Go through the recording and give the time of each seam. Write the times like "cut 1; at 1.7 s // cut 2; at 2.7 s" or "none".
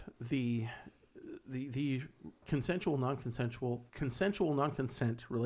cut 1; at 2.4 s // cut 2; at 3.9 s